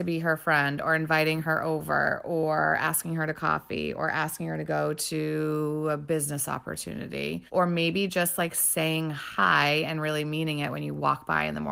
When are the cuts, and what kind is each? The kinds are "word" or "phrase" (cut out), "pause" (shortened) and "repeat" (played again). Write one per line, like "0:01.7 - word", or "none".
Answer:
0:07.5 - pause